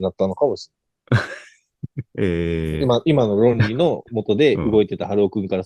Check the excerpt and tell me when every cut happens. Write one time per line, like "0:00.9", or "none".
0:02.1